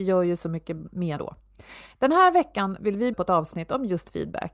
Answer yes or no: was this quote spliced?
yes